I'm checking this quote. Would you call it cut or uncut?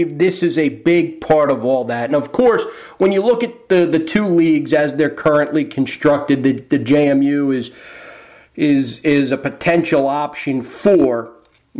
uncut